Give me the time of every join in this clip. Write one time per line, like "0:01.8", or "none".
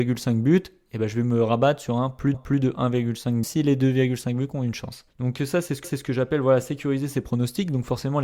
0:02.3
0:03.4
0:05.1
0:05.8